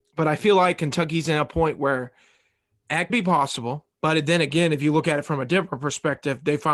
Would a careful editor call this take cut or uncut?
cut